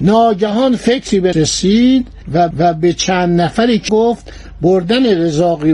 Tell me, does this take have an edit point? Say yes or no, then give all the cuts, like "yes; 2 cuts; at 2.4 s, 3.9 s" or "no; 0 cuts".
yes; 3 cuts; at 1.3 s, 2.5 s, 3.9 s